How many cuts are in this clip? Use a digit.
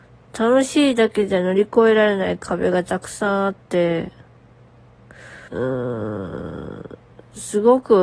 1